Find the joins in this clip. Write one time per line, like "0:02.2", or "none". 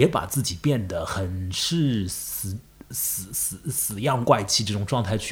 0:02.9